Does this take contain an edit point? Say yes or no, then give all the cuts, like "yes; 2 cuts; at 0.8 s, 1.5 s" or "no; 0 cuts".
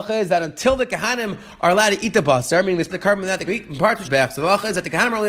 yes; 3 cuts; at 2.9 s, 3.5 s, 4.0 s